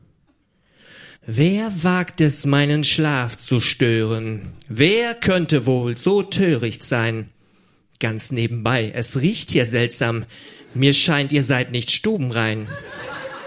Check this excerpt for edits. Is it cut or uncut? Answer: cut